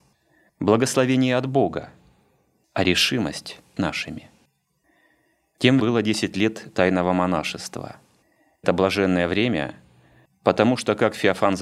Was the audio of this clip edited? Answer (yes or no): yes